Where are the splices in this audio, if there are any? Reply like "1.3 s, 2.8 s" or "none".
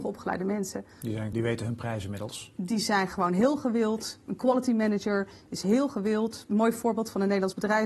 1.3 s